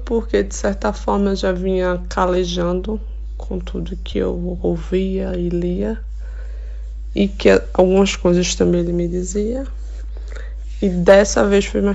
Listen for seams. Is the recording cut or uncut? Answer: uncut